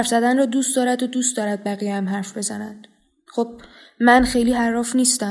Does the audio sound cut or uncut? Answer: uncut